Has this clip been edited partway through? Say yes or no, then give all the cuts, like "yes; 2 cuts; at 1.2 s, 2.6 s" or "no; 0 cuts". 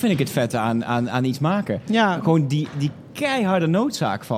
no; 0 cuts